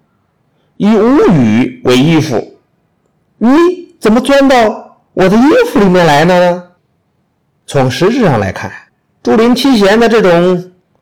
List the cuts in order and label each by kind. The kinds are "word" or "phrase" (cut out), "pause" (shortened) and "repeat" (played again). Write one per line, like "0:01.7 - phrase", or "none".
0:03.2 - pause
0:06.8 - pause
0:08.9 - pause